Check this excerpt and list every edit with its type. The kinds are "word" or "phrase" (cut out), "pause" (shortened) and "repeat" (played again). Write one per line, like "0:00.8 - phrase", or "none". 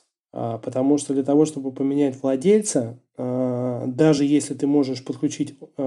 none